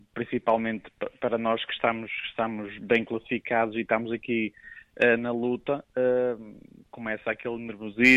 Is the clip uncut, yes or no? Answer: yes